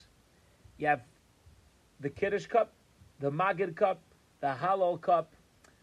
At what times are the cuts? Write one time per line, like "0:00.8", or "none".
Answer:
none